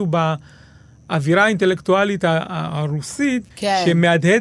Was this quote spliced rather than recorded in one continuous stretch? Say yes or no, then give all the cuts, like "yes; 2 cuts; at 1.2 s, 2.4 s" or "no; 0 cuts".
yes; 1 cut; at 3.5 s